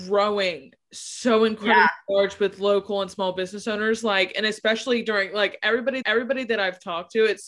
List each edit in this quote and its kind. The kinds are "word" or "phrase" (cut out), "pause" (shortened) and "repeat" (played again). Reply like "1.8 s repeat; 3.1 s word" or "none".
6.0 s repeat